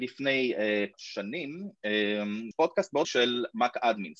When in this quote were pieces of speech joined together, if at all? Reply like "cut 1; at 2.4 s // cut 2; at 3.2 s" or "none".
cut 1; at 0.9 s // cut 2; at 2.5 s // cut 3; at 3.0 s